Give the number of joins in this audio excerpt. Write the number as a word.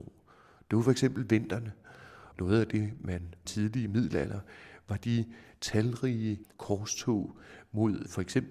three